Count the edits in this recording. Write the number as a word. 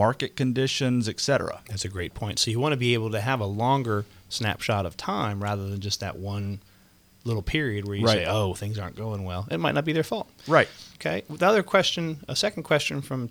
one